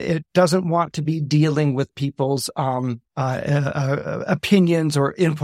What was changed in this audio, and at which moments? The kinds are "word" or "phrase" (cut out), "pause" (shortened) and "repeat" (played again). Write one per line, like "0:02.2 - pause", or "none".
0:03.1 - pause